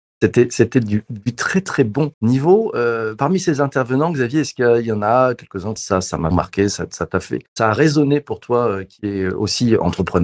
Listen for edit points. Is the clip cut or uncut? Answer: cut